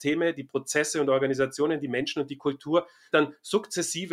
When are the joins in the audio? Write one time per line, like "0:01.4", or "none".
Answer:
0:03.1